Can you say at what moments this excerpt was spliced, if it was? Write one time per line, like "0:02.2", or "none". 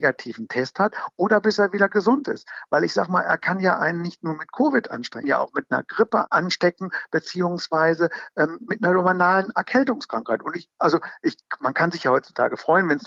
0:05.2